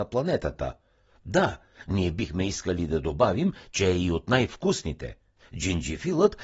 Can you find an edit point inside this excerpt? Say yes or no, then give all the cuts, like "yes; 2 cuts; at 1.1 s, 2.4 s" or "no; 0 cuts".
no; 0 cuts